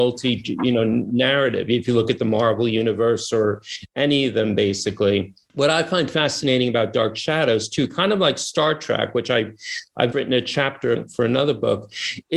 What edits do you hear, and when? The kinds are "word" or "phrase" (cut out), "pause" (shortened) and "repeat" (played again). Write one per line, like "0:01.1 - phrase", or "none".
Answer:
0:10.1 - word
0:10.9 - word